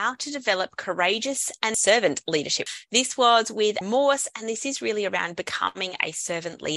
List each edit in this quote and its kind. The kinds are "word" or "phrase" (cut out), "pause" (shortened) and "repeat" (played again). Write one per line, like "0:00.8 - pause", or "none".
0:03.8 - phrase